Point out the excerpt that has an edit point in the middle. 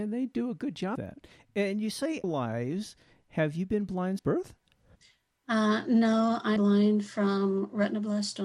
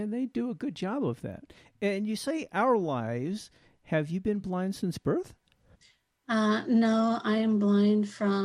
first; 4 cuts; at 1.0 s, 2.2 s, 4.2 s, 6.6 s

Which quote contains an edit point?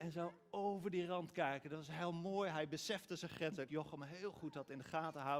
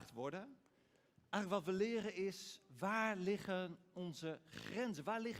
first; 1 cut; at 3.7 s

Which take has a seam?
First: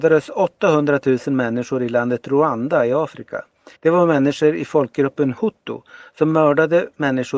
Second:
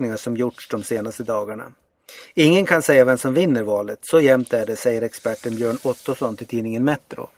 first; 1 cut; at 3.8 s

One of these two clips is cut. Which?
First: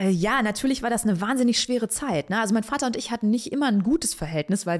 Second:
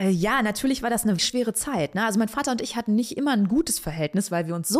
second; 1 cut; at 1.2 s

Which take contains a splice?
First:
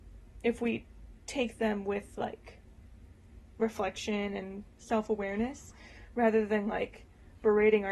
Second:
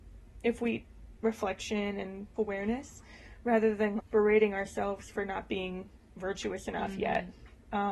second; 3 cuts; at 1.2 s, 2.4 s, 4.0 s

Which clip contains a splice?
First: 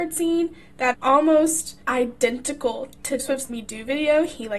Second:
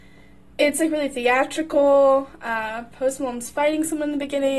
first; 4 cuts; at 0.9 s, 1.8 s, 3.2 s, 3.5 s

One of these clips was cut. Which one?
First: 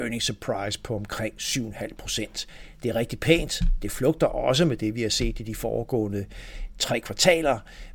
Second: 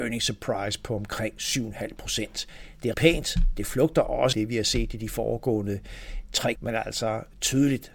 second; 3 cuts; at 2.9 s, 4.3 s, 6.6 s

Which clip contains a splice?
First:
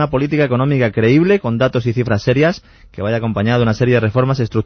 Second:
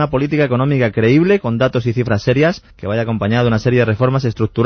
second; 1 cut; at 2.7 s

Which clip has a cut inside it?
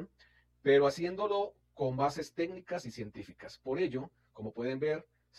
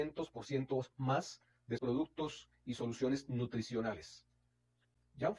second; 1 cut; at 1.8 s

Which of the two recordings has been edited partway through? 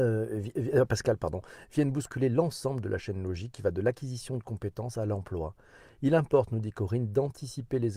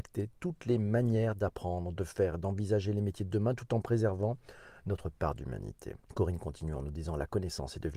second; 1 cut; at 6.0 s

